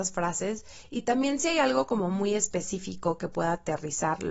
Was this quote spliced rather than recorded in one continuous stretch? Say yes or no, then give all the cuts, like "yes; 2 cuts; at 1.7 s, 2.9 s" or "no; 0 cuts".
no; 0 cuts